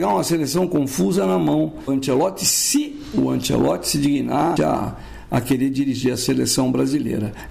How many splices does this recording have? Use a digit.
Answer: 2